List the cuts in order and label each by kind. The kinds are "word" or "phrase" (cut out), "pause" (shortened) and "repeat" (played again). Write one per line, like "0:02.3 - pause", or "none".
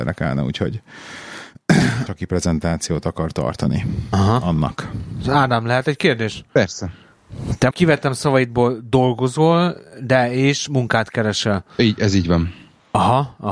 0:02.1 - phrase
0:07.7 - phrase